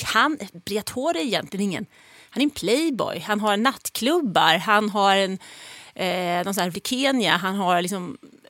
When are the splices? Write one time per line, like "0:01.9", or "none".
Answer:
0:06.7